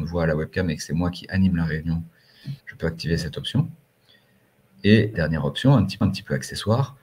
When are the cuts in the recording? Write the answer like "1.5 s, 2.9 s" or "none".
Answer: 2.6 s, 5.1 s, 6.0 s